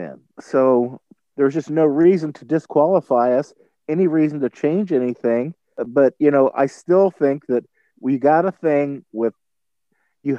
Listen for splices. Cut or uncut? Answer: uncut